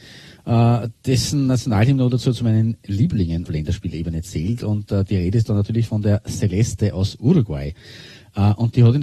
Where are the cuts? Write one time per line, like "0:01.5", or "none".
0:01.0
0:03.5